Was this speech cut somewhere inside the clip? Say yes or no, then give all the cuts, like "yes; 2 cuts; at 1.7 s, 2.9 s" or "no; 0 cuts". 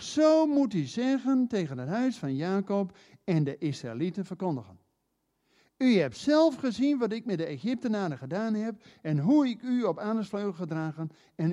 no; 0 cuts